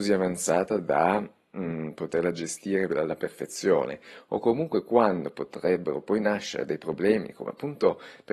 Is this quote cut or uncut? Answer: uncut